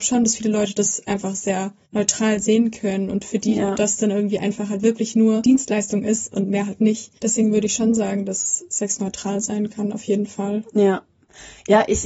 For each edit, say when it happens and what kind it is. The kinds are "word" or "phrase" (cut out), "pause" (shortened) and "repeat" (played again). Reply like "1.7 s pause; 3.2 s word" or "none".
1.8 s pause; 7.2 s pause